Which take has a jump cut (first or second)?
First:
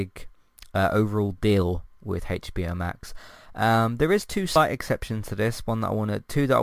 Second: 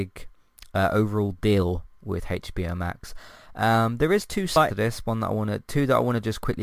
second